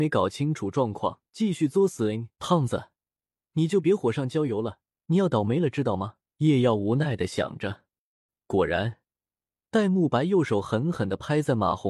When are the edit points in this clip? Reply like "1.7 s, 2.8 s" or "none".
1.3 s, 2.3 s, 4.9 s, 6.2 s